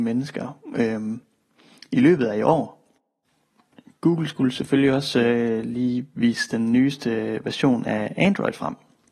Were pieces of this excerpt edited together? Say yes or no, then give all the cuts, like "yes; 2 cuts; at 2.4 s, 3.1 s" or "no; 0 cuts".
no; 0 cuts